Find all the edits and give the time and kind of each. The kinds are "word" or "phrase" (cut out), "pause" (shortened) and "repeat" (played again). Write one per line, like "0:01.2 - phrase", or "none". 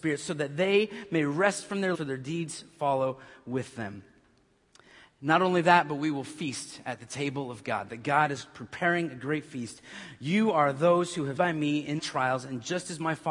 0:01.9 - word
0:11.4 - word
0:12.0 - word